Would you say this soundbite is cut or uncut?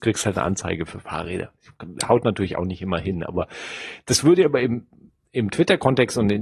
uncut